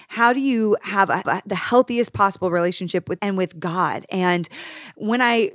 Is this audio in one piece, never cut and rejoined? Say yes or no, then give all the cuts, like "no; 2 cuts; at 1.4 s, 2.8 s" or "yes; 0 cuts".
no; 2 cuts; at 1.2 s, 3.2 s